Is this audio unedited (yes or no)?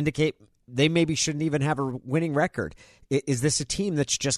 yes